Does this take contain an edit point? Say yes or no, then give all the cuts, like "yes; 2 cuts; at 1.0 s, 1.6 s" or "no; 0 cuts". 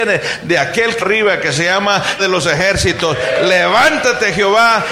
yes; 2 cuts; at 1.0 s, 2.2 s